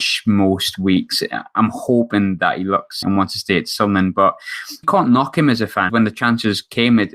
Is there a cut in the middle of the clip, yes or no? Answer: yes